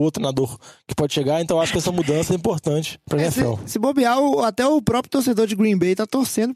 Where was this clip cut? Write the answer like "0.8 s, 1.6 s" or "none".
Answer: 2.3 s, 3.0 s